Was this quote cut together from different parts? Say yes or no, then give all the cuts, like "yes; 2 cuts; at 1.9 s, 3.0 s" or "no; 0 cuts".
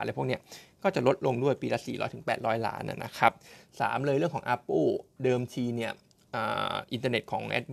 no; 0 cuts